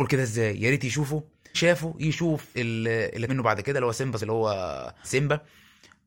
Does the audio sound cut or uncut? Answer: cut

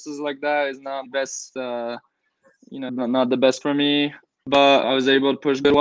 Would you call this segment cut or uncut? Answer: cut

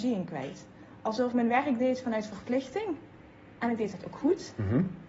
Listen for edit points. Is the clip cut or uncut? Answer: cut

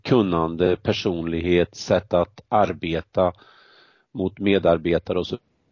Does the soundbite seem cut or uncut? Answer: uncut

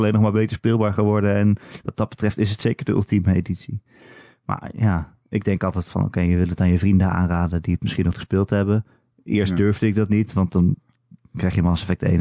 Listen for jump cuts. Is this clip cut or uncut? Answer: cut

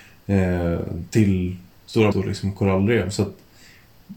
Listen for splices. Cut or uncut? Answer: cut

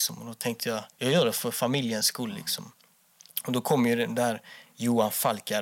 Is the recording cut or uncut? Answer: cut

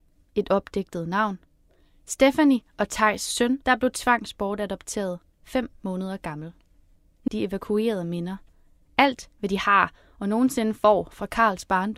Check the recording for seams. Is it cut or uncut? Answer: cut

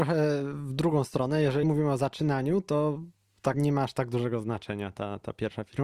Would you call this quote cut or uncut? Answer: cut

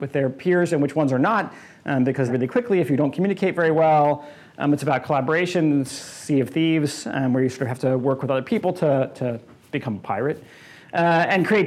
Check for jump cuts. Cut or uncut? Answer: cut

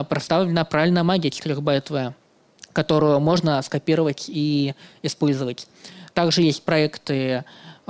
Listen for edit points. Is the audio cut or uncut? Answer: uncut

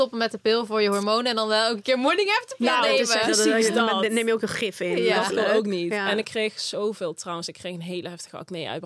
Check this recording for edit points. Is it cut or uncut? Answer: uncut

